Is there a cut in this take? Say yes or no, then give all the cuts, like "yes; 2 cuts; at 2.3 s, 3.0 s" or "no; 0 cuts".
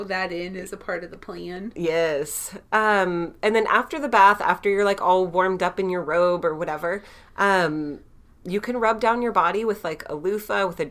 no; 0 cuts